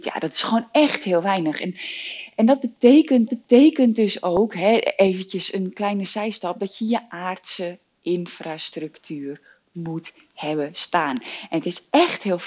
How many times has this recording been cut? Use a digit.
1